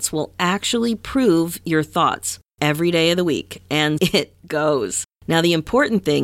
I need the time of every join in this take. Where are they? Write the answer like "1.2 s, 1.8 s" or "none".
2.5 s, 4.0 s, 5.1 s